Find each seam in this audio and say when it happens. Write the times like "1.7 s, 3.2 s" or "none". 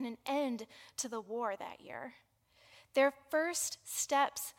none